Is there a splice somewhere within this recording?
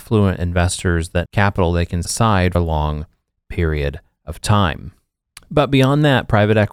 yes; 3 cuts; at 1.2 s, 2.0 s, 2.5 s

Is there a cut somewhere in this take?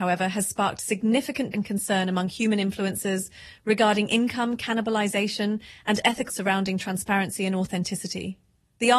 yes; 2 cuts; at 1.5 s, 6.3 s

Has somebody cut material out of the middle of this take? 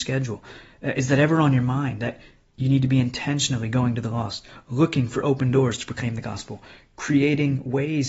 no; 0 cuts

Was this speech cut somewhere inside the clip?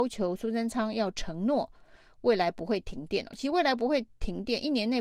no; 0 cuts

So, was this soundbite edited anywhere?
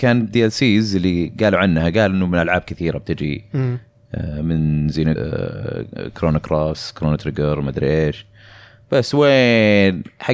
yes; 1 cut; at 5.2 s

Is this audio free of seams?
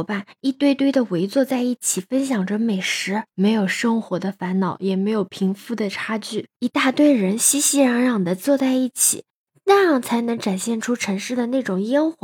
yes; 0 cuts

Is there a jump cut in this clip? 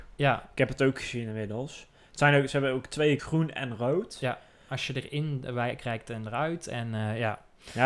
yes; 1 cut; at 3.2 s

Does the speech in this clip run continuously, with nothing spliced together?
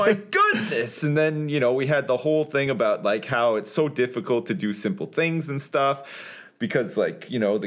yes; 0 cuts

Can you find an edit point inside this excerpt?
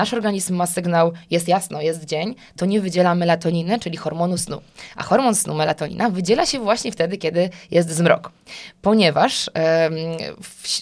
no; 0 cuts

